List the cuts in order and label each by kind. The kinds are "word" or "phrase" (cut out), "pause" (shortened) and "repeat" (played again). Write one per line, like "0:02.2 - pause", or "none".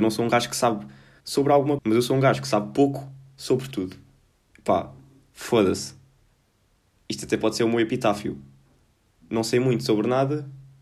0:01.2 - word
0:01.8 - word

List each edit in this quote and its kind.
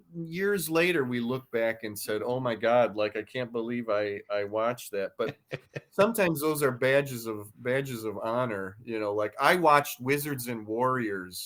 none

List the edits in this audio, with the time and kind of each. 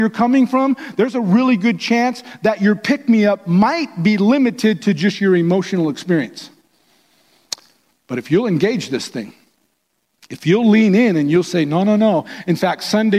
none

